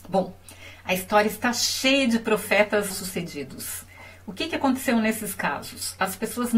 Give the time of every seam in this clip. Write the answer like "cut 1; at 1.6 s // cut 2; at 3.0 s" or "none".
cut 1; at 2.9 s